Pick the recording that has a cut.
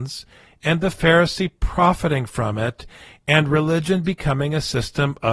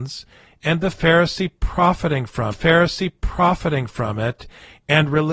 second; 1 cut; at 2.5 s

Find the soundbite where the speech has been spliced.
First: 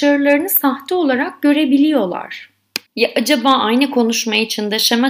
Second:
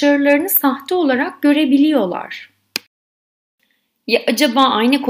first; 1 cut; at 2.9 s

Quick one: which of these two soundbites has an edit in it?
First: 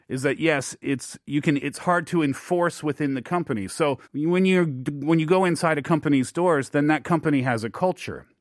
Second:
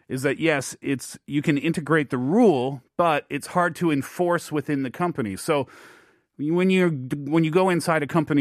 first; 2 cuts; at 1.6 s, 4.0 s

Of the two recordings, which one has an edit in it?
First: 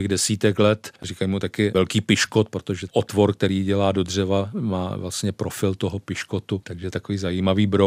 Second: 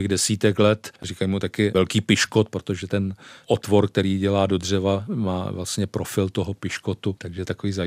first; 1 cut; at 2.9 s

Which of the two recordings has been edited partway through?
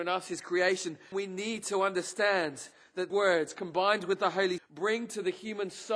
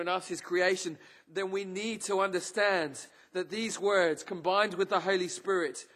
first; 3 cuts; at 1.1 s, 3.1 s, 4.6 s

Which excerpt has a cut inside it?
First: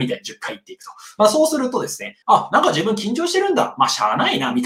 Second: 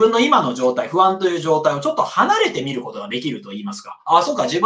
first; 1 cut; at 2.2 s

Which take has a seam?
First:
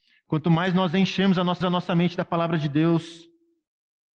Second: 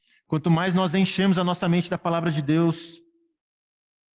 first; 1 cut; at 1.6 s

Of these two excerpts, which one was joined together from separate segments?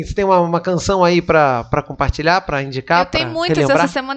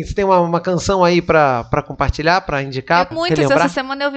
second; 1 cut; at 3.1 s

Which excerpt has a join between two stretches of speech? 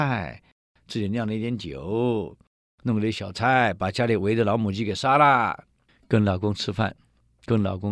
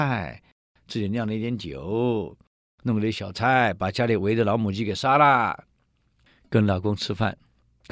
first; 1 cut; at 5.9 s

